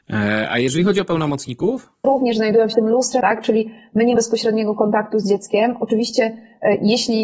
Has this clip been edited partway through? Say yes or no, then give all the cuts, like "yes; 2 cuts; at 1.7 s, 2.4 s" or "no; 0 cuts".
yes; 4 cuts; at 2.0 s, 2.7 s, 3.2 s, 4.2 s